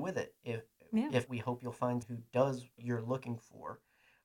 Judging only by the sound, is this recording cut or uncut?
cut